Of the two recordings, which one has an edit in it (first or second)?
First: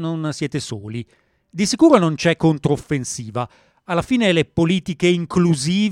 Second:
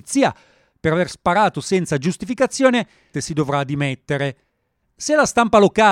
second